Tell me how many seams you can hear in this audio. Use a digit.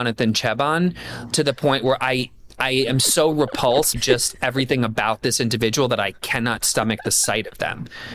1